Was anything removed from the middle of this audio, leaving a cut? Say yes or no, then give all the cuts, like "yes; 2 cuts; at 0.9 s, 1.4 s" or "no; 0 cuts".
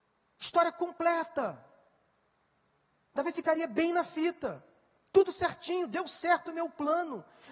no; 0 cuts